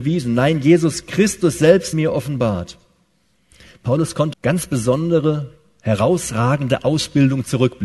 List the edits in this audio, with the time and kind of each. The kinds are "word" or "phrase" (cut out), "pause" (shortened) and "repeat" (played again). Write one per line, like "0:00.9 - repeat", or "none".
0:01.9 - phrase
0:04.3 - phrase